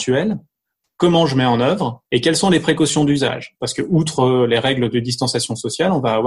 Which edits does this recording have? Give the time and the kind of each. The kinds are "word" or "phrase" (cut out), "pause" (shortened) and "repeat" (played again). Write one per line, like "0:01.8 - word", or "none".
0:02.1 - pause